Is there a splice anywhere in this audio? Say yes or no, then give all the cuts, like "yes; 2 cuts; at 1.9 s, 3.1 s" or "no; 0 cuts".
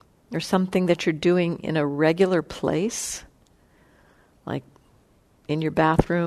no; 0 cuts